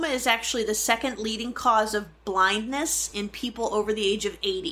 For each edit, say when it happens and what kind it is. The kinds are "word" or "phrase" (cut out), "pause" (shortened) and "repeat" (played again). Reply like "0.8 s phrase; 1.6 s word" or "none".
none